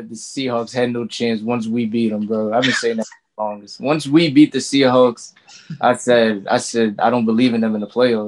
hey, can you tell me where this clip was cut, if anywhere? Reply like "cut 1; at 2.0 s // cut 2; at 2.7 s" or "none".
none